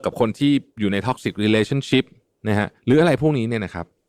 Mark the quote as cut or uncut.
cut